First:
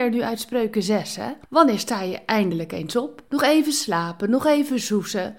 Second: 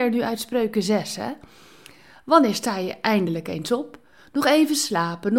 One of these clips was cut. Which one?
first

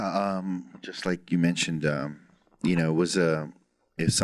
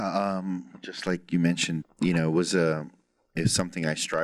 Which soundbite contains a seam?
second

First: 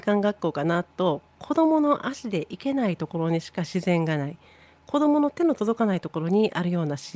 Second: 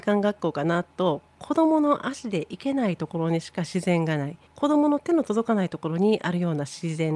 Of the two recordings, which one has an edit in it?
second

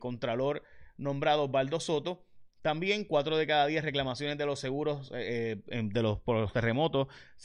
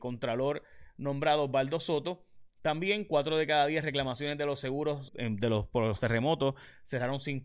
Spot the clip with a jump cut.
second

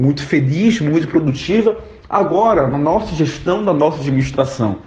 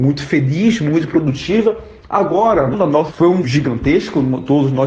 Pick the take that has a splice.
second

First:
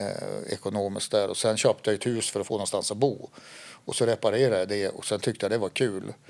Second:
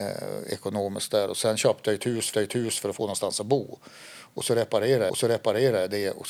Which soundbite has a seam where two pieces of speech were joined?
second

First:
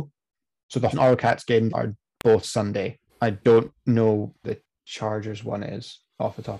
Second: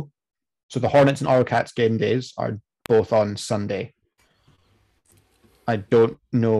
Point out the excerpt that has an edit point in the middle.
first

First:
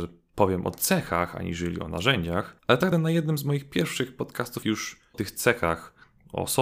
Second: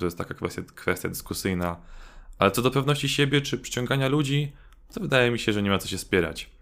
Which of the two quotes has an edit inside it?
first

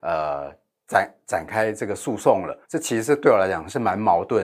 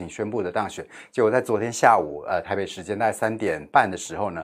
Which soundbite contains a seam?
first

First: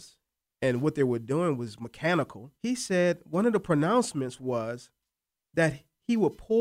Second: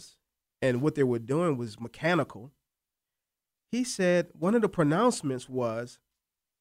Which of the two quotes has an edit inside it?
first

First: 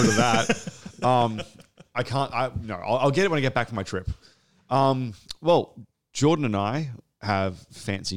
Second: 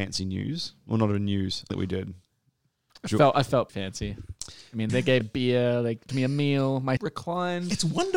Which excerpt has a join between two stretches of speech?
second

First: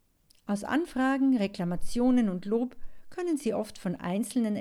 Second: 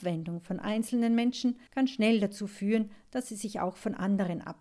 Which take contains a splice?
second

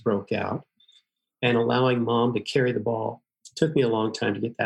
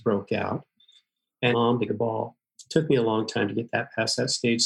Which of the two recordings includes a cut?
second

